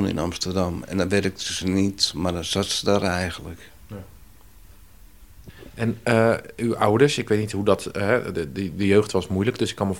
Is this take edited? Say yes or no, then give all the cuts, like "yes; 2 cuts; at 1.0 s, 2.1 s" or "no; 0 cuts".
no; 0 cuts